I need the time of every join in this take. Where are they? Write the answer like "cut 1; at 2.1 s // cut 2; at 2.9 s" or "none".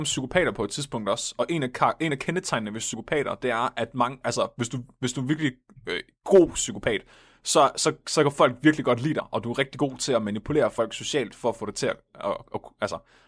none